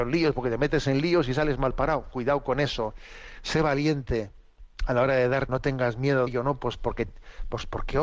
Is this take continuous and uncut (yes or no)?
no